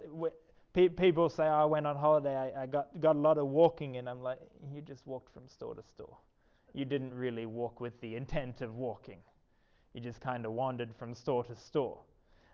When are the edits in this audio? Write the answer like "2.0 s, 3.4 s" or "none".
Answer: none